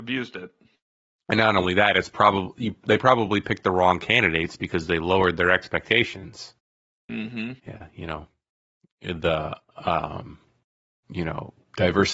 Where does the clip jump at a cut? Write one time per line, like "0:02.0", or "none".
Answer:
0:07.6